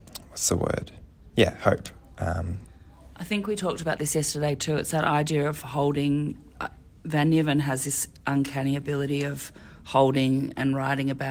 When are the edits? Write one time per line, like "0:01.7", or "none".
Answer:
none